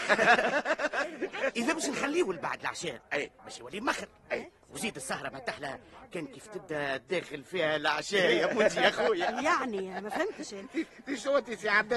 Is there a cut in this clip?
yes; 1 cut; at 3.4 s

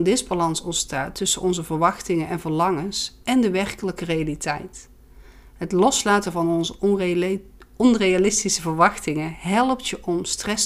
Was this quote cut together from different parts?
no; 0 cuts

